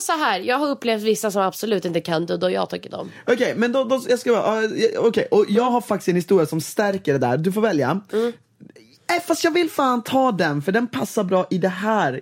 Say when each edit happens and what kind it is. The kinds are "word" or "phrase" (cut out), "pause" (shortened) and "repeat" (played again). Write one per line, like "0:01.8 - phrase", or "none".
0:02.9 - word